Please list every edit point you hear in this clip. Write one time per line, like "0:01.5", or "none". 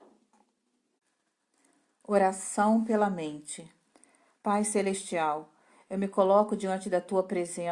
none